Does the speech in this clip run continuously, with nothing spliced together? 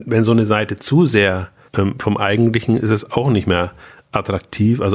no; 1 cut; at 1.7 s

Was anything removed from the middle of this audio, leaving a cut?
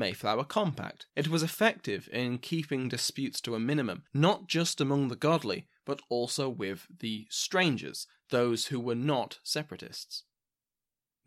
yes; 2 cuts; at 1.1 s, 4.1 s

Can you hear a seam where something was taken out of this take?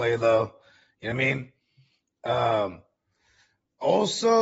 yes; 1 cut; at 1.1 s

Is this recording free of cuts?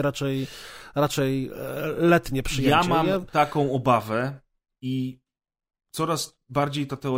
yes; 0 cuts

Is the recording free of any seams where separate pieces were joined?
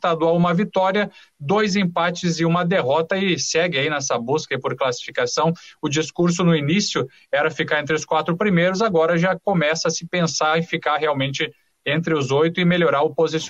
yes; 0 cuts

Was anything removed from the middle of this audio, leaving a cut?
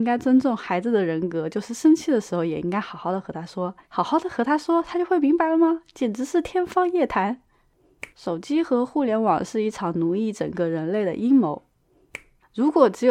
yes; 2 cuts; at 3.8 s, 8.1 s

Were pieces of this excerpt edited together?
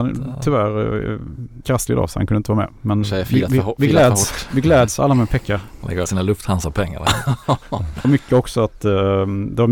yes; 4 cuts; at 1.6 s, 3.0 s, 6.1 s, 8.0 s

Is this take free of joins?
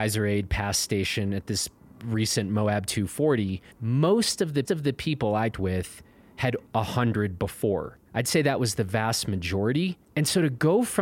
no; 6 cuts; at 1.8 s, 3.7 s, 4.7 s, 5.5 s, 6.7 s, 8.1 s

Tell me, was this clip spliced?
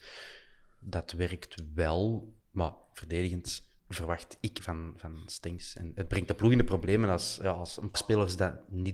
yes; 4 cuts; at 2.4 s, 3.8 s, 4.6 s, 7.9 s

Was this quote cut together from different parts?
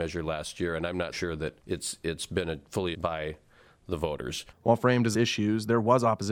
yes; 5 cuts; at 1.1 s, 1.6 s, 2.9 s, 4.5 s, 5.1 s

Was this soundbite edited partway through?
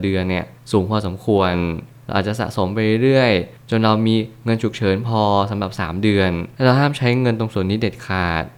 yes; 1 cut; at 6.5 s

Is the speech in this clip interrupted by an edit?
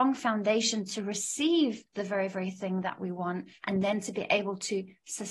yes; 1 cut; at 1.9 s

